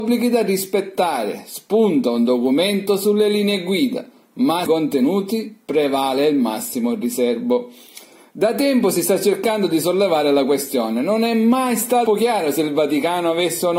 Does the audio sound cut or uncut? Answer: cut